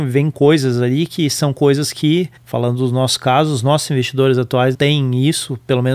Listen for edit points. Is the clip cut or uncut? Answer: cut